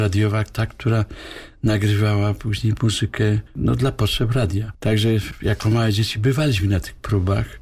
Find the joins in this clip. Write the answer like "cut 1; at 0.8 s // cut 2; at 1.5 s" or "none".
none